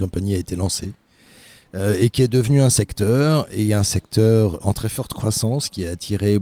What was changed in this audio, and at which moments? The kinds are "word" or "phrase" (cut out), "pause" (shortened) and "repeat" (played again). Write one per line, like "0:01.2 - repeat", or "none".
0:04.6 - word